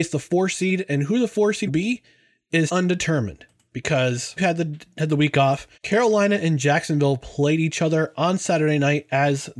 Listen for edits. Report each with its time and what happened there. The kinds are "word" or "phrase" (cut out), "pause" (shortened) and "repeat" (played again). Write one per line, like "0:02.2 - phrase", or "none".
0:01.7 - word
0:02.7 - word
0:04.4 - word
0:05.7 - pause